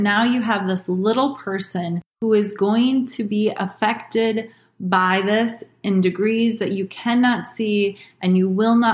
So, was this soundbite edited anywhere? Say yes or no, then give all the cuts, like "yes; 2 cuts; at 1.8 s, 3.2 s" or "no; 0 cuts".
no; 0 cuts